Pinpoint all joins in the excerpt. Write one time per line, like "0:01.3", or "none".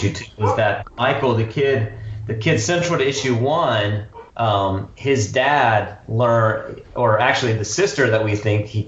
0:04.3